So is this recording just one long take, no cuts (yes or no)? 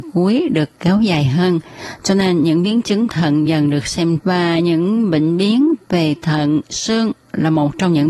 no